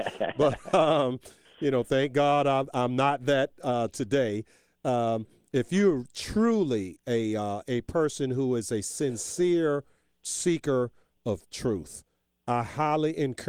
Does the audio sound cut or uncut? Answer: uncut